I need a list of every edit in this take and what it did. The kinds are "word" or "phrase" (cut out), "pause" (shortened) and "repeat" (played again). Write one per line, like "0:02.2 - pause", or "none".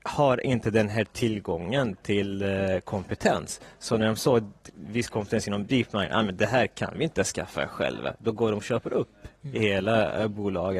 none